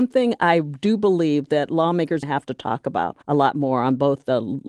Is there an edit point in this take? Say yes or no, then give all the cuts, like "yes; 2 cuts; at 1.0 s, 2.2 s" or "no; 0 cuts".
yes; 2 cuts; at 2.2 s, 3.2 s